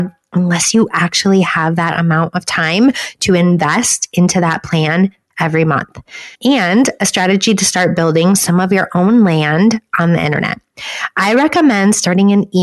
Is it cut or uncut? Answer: cut